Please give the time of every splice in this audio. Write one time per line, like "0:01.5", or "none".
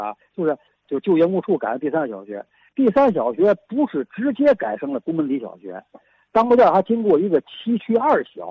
none